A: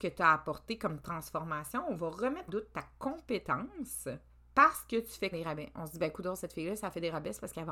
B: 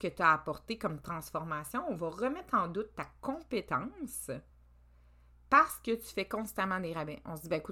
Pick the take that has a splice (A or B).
A